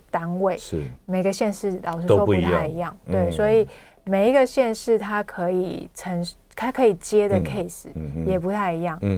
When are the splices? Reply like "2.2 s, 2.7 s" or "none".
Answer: none